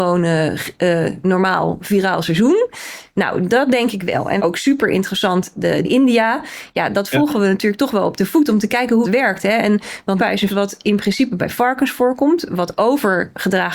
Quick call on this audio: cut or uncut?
cut